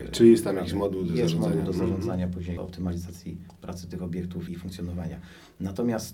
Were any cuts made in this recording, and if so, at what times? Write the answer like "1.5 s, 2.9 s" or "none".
2.6 s, 4.5 s